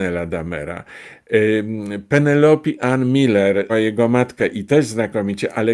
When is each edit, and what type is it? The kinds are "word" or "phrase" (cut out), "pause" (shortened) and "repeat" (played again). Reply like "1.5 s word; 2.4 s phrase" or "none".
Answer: 3.7 s word